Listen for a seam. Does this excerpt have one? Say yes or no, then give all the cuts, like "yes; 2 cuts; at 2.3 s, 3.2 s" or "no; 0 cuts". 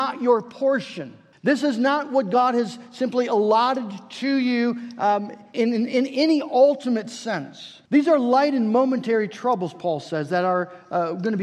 yes; 3 cuts; at 1.3 s, 5.5 s, 7.9 s